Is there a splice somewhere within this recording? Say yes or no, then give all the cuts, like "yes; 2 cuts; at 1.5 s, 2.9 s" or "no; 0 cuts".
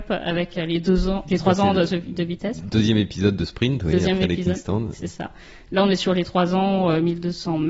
no; 0 cuts